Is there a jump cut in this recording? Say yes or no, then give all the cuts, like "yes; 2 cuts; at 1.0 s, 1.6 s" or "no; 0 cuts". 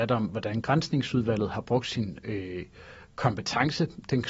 no; 0 cuts